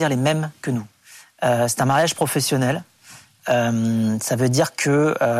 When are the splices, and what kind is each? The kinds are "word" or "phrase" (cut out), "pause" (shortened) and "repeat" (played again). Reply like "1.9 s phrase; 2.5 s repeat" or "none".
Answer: none